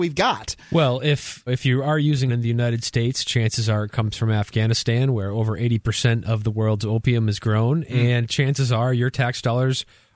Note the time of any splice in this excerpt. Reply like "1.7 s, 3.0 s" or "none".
1.5 s, 2.3 s